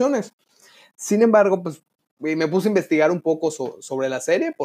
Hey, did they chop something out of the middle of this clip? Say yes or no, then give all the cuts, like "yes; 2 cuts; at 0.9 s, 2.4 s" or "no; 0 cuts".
no; 0 cuts